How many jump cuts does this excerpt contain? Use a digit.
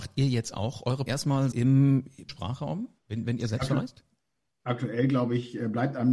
4